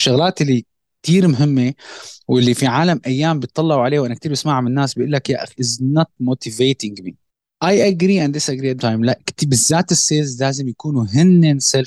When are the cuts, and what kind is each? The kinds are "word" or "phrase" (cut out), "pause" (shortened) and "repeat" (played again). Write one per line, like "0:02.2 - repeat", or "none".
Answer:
0:05.5 - word
0:07.3 - pause
0:08.8 - word